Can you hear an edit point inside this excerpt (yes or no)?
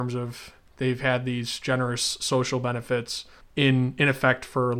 yes